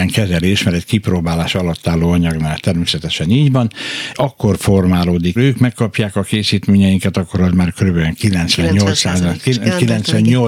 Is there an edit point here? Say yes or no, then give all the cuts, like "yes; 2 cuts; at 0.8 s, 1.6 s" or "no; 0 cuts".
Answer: yes; 2 cuts; at 4.1 s, 5.4 s